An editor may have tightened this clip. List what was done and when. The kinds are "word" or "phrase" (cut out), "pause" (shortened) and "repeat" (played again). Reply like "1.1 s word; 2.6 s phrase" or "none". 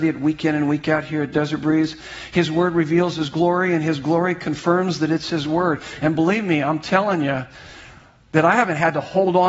none